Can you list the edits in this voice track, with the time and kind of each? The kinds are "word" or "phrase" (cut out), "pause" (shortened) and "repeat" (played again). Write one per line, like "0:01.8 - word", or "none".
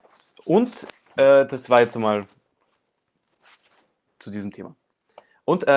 none